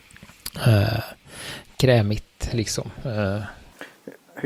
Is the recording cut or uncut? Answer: uncut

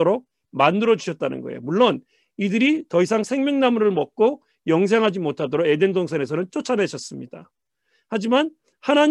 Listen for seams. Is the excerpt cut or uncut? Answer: uncut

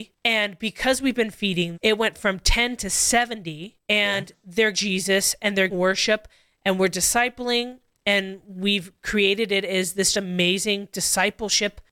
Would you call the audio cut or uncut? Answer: cut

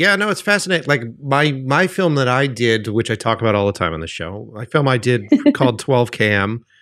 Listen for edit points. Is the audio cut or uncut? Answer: uncut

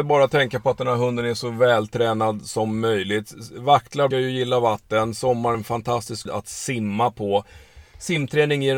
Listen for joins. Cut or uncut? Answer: cut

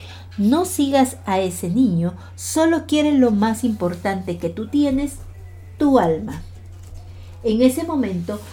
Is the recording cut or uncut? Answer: uncut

